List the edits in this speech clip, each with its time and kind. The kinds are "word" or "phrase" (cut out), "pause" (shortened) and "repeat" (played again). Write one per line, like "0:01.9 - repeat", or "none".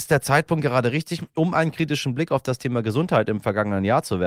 none